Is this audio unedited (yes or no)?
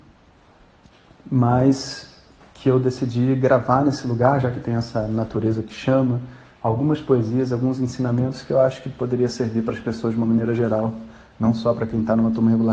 yes